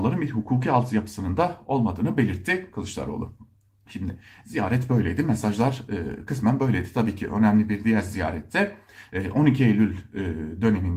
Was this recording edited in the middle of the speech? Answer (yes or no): no